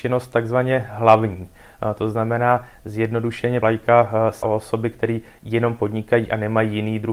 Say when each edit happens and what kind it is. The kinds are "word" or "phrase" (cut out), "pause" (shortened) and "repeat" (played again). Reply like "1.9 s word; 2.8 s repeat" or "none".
3.6 s word; 4.4 s word